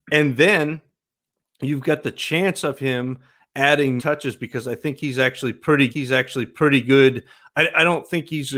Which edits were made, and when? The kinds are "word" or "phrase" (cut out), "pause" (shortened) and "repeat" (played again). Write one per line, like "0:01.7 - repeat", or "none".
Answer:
0:04.0 - word
0:05.9 - repeat